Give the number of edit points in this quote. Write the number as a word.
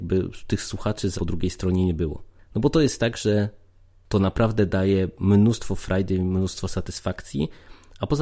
one